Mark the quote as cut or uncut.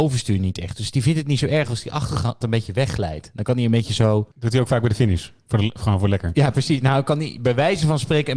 cut